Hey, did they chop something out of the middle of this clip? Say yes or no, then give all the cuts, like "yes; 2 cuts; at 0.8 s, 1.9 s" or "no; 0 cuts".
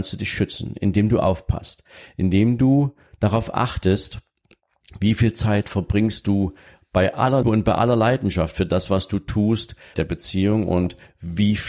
yes; 2 cuts; at 7.4 s, 9.9 s